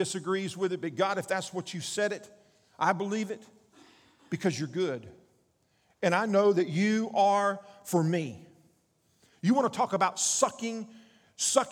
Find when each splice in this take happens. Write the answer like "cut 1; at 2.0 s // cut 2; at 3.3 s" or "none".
none